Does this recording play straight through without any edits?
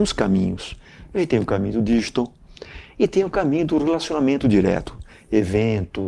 yes; 0 cuts

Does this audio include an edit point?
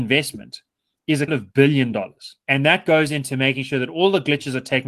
yes; 2 cuts; at 1.3 s, 2.4 s

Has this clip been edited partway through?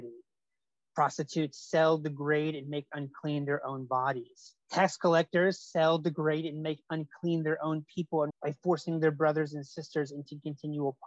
yes; 2 cuts; at 4.6 s, 8.3 s

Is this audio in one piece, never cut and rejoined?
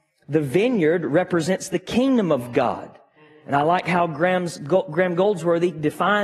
yes; 0 cuts

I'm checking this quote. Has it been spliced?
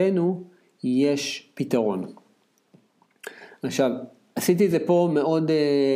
no; 0 cuts

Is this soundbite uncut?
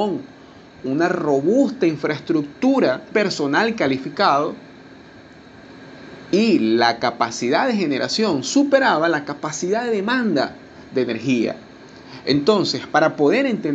no; 1 cut; at 3.1 s

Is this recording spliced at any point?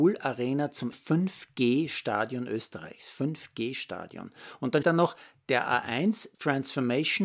yes; 3 cuts; at 0.9 s, 4.8 s, 6.3 s

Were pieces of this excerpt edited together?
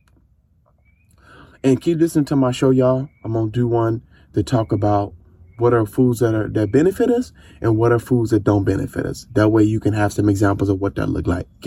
no; 0 cuts

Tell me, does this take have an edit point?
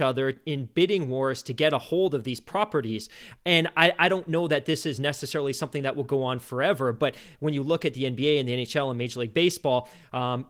no; 0 cuts

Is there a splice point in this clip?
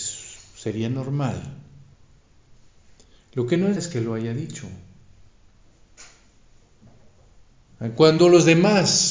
yes; 1 cut; at 3.8 s

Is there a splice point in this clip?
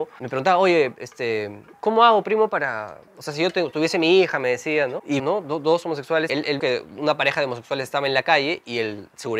yes; 5 cuts; at 1.7 s, 3.1 s, 5.2 s, 6.3 s, 6.6 s

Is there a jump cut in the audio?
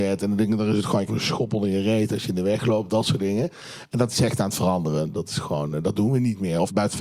yes; 1 cut; at 1.1 s

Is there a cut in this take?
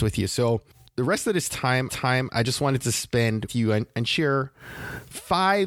yes; 2 cuts; at 1.9 s, 3.5 s

